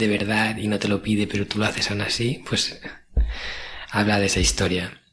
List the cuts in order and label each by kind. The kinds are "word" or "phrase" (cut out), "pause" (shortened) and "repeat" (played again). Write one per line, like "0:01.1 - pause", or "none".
none